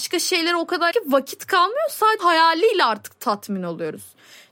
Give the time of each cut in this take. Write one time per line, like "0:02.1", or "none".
0:00.9
0:02.2